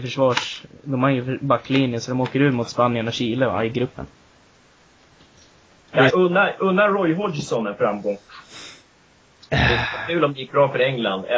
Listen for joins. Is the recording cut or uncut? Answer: cut